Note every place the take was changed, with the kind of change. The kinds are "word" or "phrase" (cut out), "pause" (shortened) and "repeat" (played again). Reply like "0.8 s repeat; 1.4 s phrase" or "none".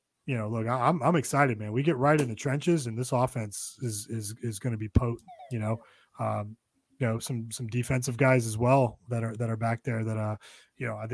none

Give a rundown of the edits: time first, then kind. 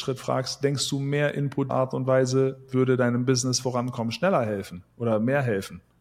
1.7 s word

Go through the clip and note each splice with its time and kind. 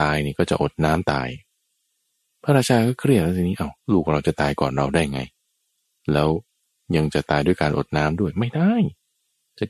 3.8 s pause

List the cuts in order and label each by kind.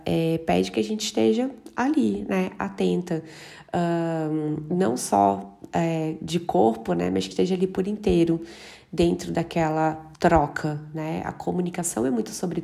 7.3 s phrase; 10.1 s pause

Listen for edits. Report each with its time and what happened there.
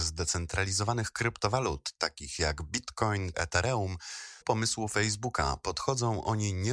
3.3 s word; 4.4 s word

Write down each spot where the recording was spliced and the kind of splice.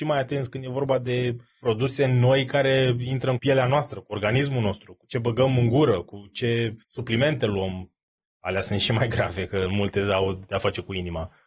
3.4 s phrase; 6.8 s pause

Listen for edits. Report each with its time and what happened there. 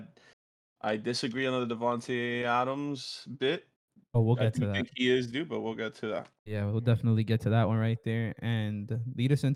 6.4 s pause

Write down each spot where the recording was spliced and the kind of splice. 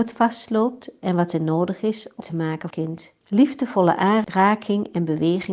2.2 s phrase; 2.7 s phrase; 3.2 s pause

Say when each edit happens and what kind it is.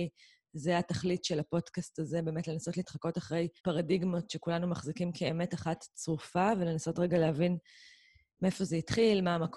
3.6 s pause

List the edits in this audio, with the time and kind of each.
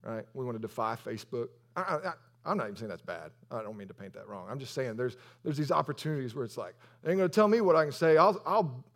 none

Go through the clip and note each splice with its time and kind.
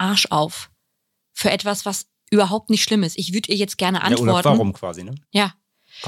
none

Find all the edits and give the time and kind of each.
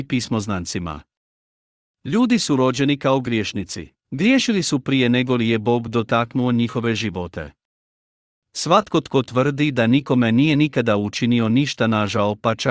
4.0 s pause

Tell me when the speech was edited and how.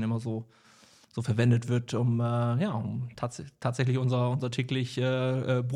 none

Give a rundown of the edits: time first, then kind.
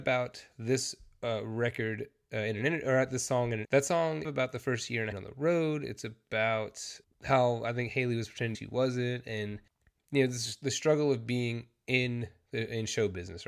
3.6 s phrase; 4.2 s phrase; 5.1 s phrase; 8.5 s phrase

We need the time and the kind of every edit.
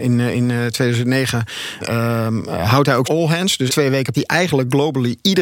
1.8 s word; 3.0 s word; 3.7 s phrase; 4.1 s word

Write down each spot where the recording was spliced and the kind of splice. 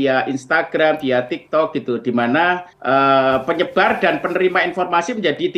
2.7 s pause

